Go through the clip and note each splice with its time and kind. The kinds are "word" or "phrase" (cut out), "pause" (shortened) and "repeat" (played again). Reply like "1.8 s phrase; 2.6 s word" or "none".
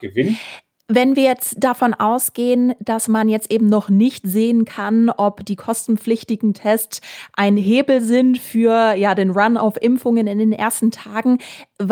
none